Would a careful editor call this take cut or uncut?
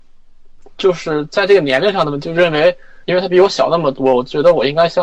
cut